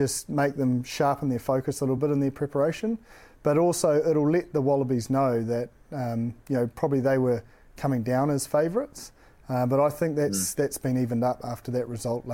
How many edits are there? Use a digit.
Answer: 0